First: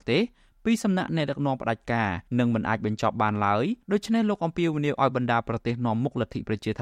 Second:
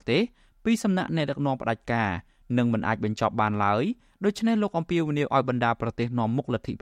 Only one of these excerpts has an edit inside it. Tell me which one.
first; 2 cuts; at 2.3 s, 3.8 s

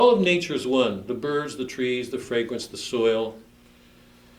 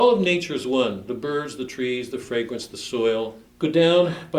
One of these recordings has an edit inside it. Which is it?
second; 1 cut; at 3.5 s

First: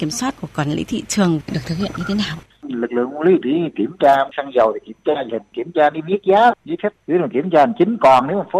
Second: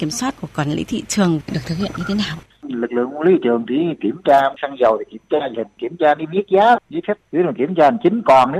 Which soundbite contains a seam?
first; 1 cut; at 3.4 s

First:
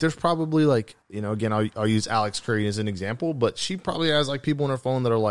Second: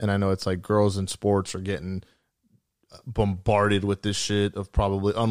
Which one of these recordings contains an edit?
first; 1 cut; at 1.0 s

